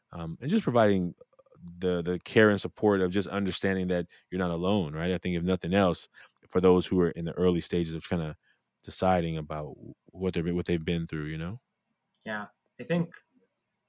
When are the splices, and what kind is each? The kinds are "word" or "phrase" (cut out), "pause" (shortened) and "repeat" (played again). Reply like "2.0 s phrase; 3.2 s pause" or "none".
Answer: none

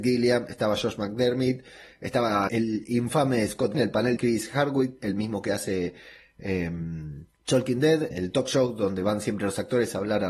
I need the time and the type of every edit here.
2.5 s word; 3.7 s phrase; 4.2 s phrase; 7.3 s pause; 8.1 s word

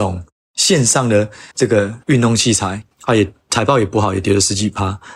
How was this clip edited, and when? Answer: 1.5 s pause; 2.0 s pause; 2.9 s pause

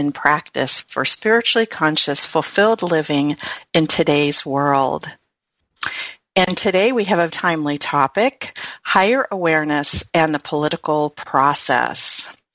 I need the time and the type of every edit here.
7.3 s word

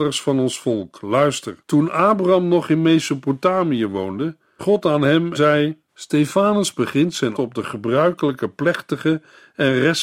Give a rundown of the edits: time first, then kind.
1.6 s pause; 4.6 s word; 5.3 s word; 5.9 s pause; 7.3 s word

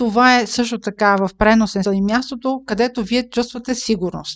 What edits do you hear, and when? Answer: 1.8 s word

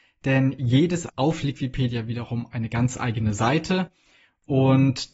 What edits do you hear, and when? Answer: 1.1 s phrase

